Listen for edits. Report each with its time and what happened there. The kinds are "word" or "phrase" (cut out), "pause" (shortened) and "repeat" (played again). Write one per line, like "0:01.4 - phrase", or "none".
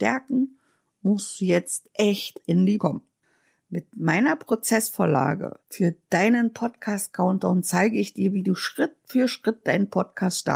0:02.8 - word

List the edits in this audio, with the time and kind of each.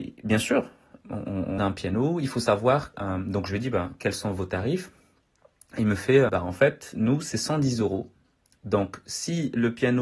0:01.0 - word
0:01.6 - word
0:02.9 - word
0:06.3 - word

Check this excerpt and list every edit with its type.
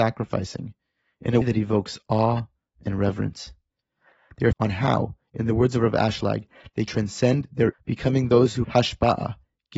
0:01.4 - word
0:04.5 - word
0:06.9 - word
0:07.7 - word
0:08.6 - word

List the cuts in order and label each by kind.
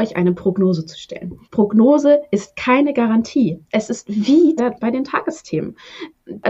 0:01.4 - pause
0:04.6 - phrase

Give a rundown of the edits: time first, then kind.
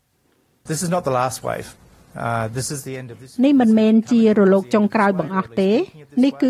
none

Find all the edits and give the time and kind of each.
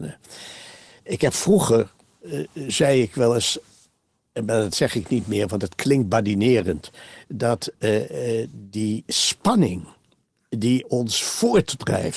none

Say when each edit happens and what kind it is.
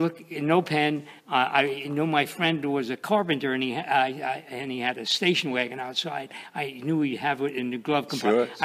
0:01.2 - pause

